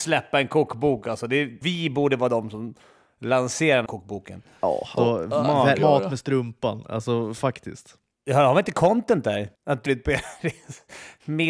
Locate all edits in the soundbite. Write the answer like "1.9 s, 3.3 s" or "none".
1.6 s, 3.9 s, 5.0 s, 5.8 s, 9.6 s, 9.9 s